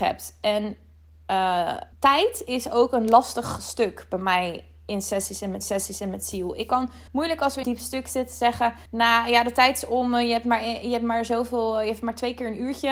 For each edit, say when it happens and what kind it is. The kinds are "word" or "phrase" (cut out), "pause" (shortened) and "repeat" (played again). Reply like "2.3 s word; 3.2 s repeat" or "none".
1.9 s pause; 5.6 s repeat; 7.1 s pause; 7.6 s phrase; 8.9 s pause